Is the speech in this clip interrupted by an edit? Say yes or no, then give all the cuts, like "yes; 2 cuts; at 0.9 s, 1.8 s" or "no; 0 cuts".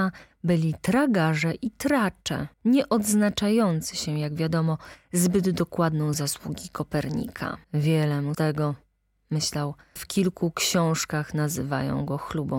yes; 5 cuts; at 2.5 s, 6.1 s, 7.6 s, 8.3 s, 10.0 s